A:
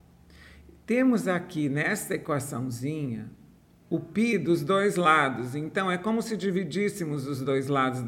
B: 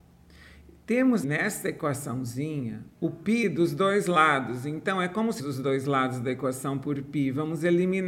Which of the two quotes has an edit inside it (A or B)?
B